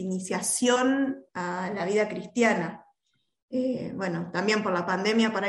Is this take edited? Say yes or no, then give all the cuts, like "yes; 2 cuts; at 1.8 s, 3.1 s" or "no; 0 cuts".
no; 0 cuts